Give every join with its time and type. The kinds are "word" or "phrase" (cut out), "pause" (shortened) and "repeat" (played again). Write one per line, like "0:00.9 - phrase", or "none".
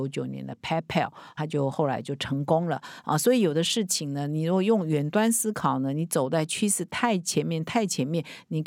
0:01.4 - word